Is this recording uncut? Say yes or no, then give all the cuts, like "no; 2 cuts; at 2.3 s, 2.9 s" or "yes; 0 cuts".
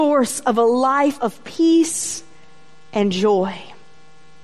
yes; 0 cuts